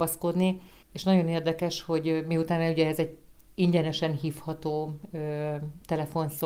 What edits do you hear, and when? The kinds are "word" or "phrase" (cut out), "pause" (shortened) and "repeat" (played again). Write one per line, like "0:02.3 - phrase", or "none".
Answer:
none